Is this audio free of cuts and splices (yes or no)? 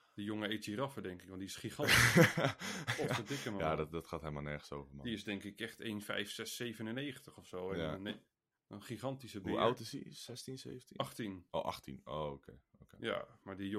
yes